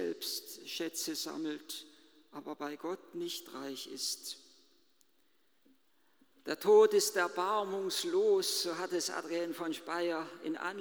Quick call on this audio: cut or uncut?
uncut